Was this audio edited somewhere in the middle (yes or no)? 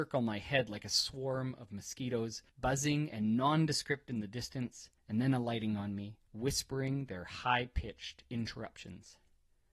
yes